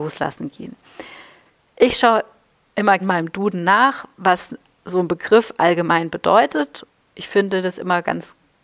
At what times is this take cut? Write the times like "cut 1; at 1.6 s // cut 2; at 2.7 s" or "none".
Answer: cut 1; at 3.0 s